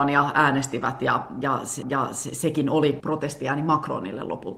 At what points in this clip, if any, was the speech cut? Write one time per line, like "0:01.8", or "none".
0:01.8
0:03.0